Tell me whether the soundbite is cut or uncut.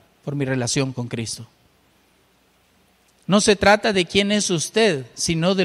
uncut